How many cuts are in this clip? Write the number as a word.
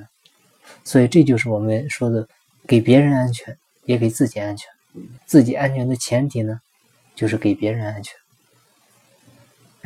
one